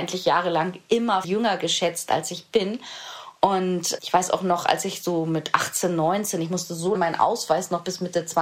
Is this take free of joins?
no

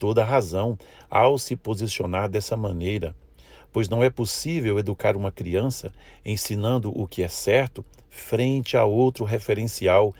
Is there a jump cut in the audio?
no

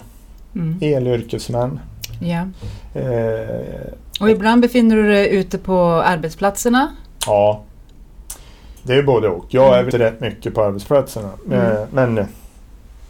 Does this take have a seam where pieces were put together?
yes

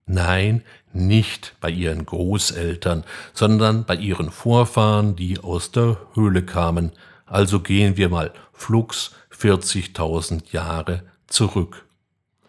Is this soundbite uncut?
yes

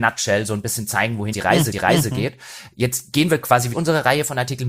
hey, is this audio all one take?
no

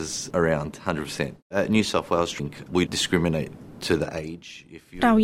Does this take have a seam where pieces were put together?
yes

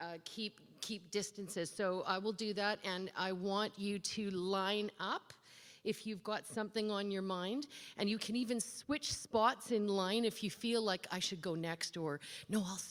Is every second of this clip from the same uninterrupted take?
yes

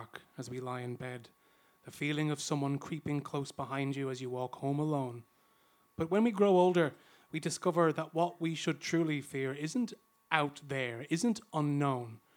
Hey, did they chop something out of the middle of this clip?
no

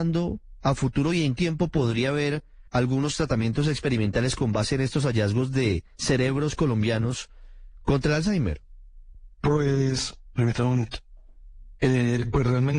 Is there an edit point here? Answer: yes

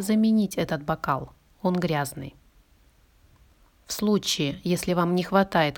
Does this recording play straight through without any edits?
yes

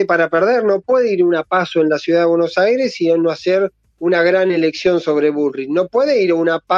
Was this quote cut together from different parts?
no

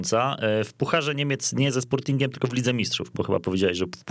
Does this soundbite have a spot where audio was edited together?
no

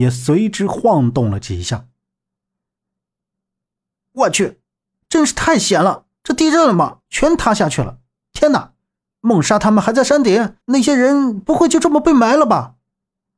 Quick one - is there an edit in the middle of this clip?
yes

